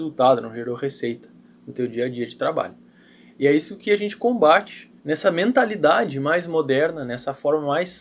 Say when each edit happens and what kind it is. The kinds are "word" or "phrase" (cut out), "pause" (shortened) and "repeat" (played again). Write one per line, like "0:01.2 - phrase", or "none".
none